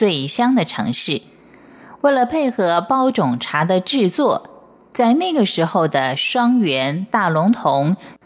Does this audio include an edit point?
no; 0 cuts

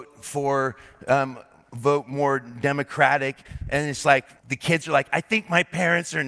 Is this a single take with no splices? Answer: no; 1 cut; at 4.4 s

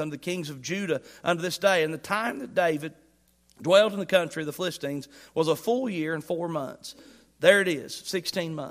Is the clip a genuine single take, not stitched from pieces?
yes; 0 cuts

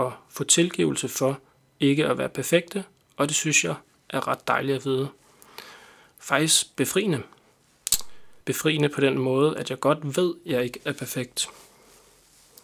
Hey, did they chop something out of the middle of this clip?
yes; 1 cut; at 8.4 s

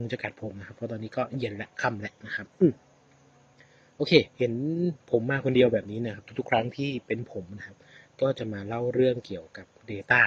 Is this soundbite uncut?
no; 1 cut; at 4.3 s

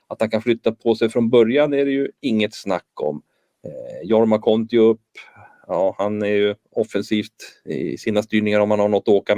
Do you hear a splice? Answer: no; 0 cuts

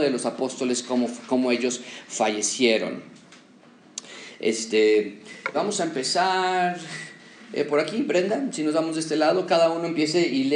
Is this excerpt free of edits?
no; 1 cut; at 5.5 s

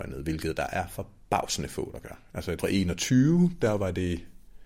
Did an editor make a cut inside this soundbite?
yes; 1 cut; at 2.6 s

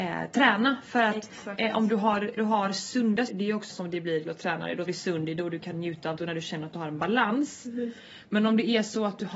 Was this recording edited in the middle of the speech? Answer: yes; 6 cuts; at 2.4 s, 3.3 s, 3.7 s, 4.2 s, 4.9 s, 6.2 s

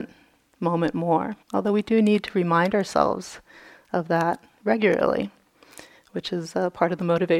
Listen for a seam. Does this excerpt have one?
yes; 1 cut; at 1.4 s

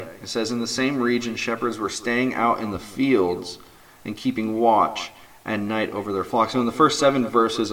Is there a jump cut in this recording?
no; 0 cuts

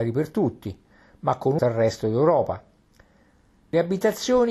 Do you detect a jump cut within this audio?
yes; 1 cut; at 1.6 s

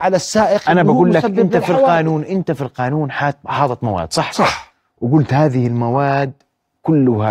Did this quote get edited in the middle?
no; 0 cuts

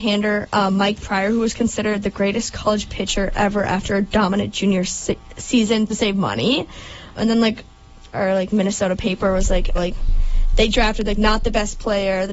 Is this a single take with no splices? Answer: no; 3 cuts; at 5.9 s, 7.2 s, 9.7 s

